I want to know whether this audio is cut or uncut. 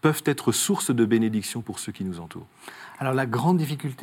uncut